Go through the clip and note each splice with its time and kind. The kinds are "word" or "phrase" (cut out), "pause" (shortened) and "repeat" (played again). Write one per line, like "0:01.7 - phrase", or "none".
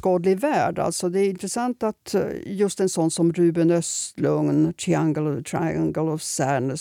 none